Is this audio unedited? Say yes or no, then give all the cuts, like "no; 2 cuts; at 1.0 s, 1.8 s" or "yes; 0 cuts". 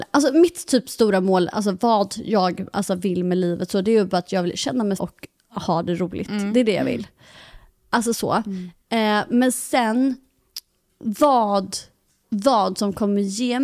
no; 1 cut; at 5.0 s